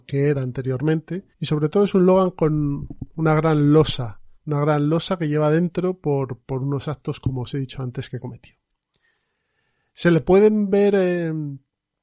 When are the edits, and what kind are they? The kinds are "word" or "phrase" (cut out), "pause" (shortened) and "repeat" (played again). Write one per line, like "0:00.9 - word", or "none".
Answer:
0:01.3 - pause
0:04.3 - pause

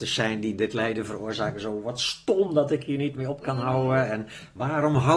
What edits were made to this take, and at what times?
none

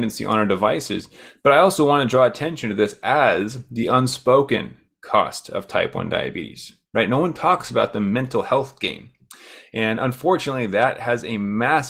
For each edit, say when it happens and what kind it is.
none

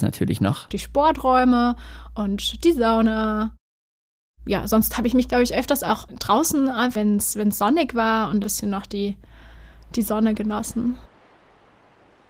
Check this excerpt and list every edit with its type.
0:07.0 - word
0:08.4 - phrase

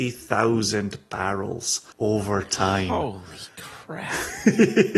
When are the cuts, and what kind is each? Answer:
0:01.9 - pause

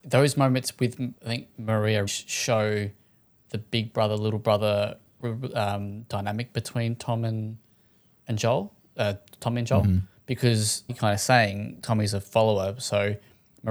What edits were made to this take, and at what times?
0:01.2 - pause
0:02.1 - word
0:10.9 - word

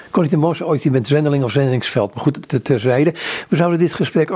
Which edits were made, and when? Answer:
0:02.4 - word

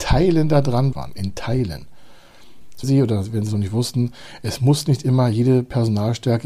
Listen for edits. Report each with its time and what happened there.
0:00.9 - word
0:02.8 - phrase

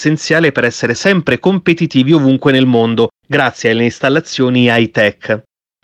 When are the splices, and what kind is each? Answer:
none

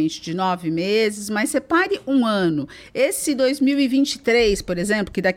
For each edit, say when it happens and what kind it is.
none

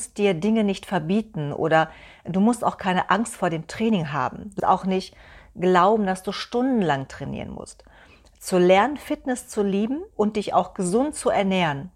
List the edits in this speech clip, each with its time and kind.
0:04.6 - word
0:10.1 - pause

